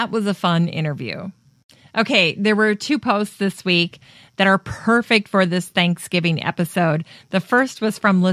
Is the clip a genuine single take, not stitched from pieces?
yes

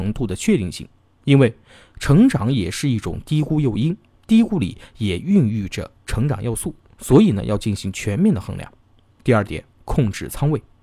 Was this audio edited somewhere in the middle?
no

